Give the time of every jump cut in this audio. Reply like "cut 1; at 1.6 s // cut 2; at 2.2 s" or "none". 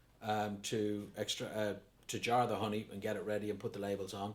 cut 1; at 1.9 s